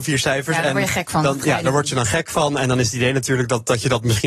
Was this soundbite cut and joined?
no; 0 cuts

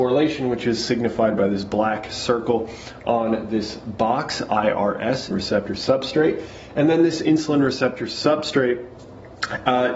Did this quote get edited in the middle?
yes; 1 cut; at 5.3 s

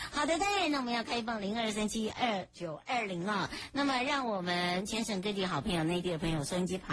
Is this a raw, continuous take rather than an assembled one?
no; 1 cut; at 2.5 s

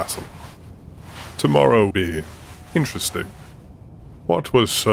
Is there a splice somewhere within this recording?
yes; 1 cut; at 1.9 s

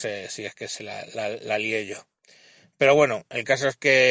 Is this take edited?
no; 0 cuts

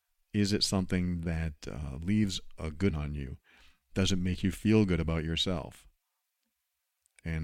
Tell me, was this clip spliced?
yes; 1 cut; at 2.9 s

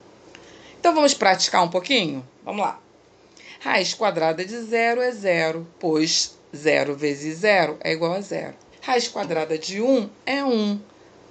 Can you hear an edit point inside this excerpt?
yes; 2 cuts; at 5.7 s, 8.7 s

